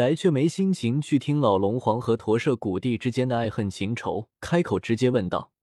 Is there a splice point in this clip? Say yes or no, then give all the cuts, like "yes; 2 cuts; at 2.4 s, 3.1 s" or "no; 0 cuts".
yes; 1 cut; at 4.3 s